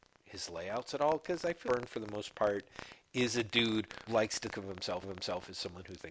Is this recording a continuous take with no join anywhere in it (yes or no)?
no